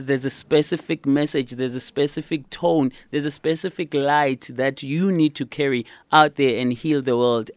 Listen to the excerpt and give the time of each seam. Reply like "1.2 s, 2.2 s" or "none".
none